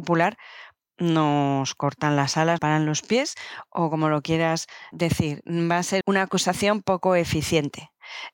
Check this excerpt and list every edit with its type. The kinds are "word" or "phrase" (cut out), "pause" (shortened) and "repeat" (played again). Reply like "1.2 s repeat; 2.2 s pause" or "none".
2.6 s word; 4.9 s word; 6.0 s word